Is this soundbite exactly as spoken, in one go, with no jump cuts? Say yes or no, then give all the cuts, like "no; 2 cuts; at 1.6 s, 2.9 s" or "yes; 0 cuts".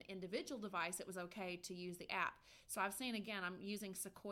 yes; 0 cuts